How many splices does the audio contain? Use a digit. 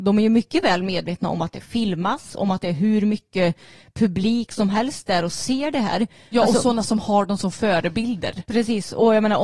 0